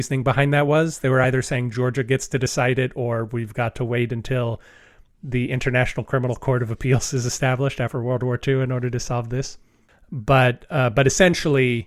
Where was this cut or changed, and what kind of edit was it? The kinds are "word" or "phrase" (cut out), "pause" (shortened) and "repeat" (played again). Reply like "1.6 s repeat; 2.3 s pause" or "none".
none